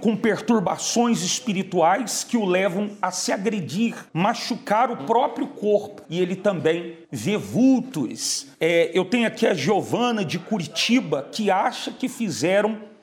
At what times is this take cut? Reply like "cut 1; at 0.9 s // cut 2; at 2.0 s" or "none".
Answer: cut 1; at 4.1 s // cut 2; at 6.0 s // cut 3; at 7.0 s // cut 4; at 8.5 s